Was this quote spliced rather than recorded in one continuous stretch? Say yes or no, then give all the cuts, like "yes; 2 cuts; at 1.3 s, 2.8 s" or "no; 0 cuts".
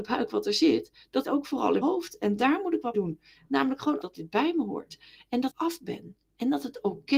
yes; 5 cuts; at 1.2 s, 1.8 s, 2.9 s, 4.0 s, 5.5 s